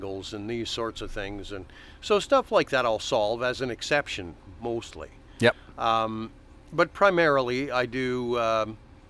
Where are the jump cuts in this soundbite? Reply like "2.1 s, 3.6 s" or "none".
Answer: none